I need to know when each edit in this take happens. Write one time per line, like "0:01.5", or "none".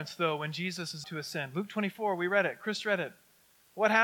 0:01.0